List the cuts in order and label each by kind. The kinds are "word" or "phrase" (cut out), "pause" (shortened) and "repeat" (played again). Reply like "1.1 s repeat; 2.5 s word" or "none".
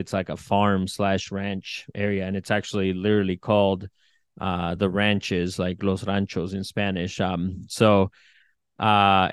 none